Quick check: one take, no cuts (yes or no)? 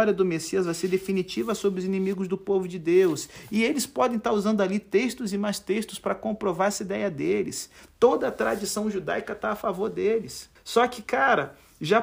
no